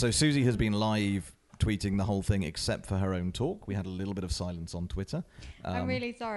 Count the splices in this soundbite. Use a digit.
0